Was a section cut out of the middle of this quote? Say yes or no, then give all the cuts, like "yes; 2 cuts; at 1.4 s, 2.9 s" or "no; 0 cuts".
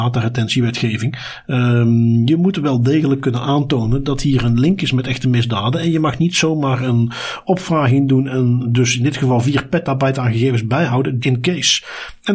yes; 1 cut; at 11.2 s